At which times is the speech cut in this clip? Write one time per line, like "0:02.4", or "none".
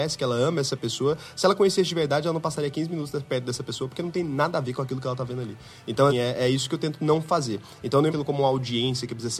0:06.1
0:08.1